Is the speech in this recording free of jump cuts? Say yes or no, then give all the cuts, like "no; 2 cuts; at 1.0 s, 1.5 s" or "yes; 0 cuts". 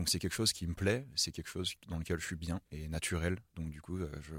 no; 2 cuts; at 2.7 s, 3.5 s